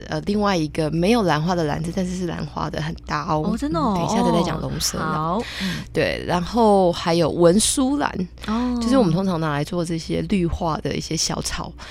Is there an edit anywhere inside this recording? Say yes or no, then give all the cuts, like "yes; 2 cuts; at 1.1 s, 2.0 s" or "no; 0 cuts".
no; 0 cuts